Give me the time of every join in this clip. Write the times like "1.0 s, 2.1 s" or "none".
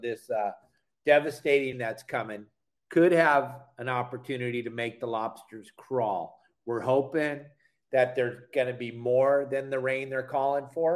1.7 s, 2.8 s